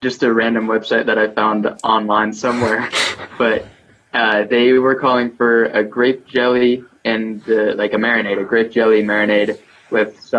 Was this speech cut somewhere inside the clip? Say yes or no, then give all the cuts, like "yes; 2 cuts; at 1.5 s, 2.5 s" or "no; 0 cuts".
no; 0 cuts